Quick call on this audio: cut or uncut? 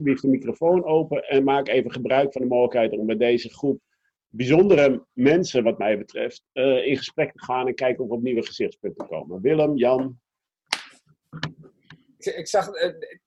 uncut